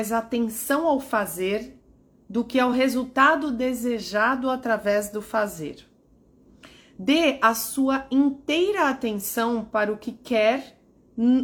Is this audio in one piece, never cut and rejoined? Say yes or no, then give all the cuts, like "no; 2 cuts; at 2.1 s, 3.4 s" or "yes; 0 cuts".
yes; 0 cuts